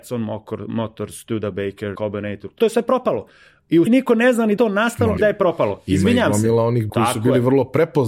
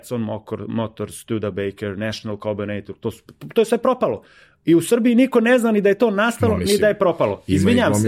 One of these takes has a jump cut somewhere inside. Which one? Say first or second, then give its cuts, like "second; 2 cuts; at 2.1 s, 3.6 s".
first; 6 cuts; at 1.9 s, 2.6 s, 3.9 s, 4.6 s, 5.2 s, 6.9 s